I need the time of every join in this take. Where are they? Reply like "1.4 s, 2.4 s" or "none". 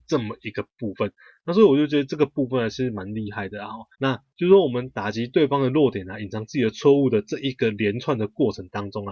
3.9 s